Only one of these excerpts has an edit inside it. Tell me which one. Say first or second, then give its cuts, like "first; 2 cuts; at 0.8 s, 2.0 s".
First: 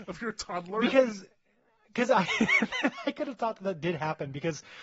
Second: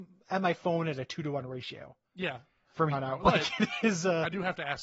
second; 1 cut; at 2.9 s